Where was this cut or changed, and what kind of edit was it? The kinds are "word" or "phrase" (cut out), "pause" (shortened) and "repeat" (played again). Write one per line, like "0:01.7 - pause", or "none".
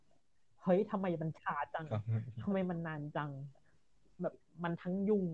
none